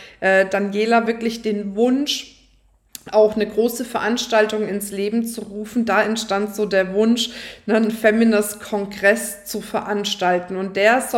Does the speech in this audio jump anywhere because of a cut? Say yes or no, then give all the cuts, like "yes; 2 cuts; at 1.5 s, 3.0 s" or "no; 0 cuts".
no; 0 cuts